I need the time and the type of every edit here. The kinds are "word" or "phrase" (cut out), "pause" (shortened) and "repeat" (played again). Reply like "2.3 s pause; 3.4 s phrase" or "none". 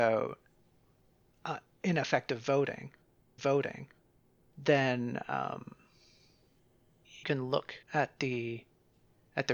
3.4 s repeat; 7.2 s phrase; 7.8 s pause